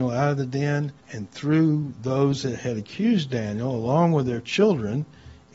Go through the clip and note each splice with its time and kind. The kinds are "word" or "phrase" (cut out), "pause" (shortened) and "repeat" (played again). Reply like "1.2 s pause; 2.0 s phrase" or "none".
1.0 s pause